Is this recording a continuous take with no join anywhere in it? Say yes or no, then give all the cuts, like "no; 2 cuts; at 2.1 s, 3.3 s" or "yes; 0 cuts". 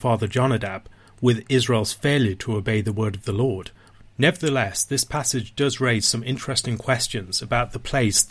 yes; 0 cuts